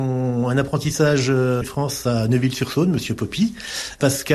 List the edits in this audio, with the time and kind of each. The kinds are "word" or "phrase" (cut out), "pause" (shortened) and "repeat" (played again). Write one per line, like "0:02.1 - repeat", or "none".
0:01.6 - phrase

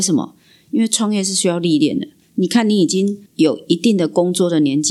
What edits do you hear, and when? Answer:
0:03.3 - pause

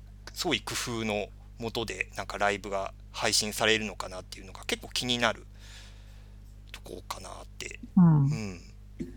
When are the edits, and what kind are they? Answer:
0:07.9 - pause

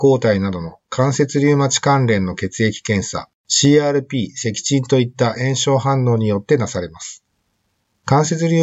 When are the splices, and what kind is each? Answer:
0:03.4 - pause

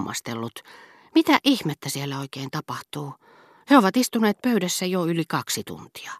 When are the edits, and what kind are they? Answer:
none

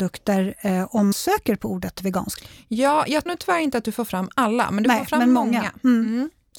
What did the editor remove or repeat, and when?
0:01.1 - word
0:03.3 - word

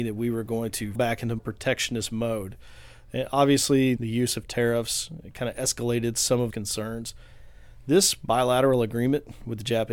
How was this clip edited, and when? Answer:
0:01.0 - word
0:01.4 - word
0:04.0 - word
0:06.5 - word

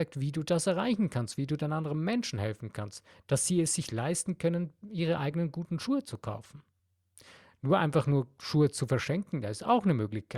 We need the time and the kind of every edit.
none

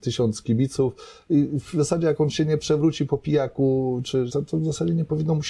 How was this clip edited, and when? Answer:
0:04.3 - word

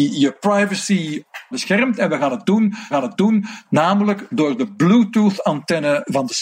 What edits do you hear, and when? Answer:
0:01.5 - word
0:02.9 - repeat

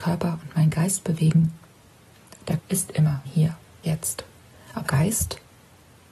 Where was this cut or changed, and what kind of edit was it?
0:02.6 - word
0:03.2 - word
0:03.8 - word
0:04.9 - word

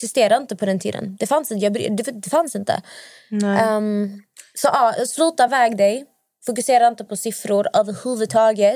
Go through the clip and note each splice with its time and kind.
none

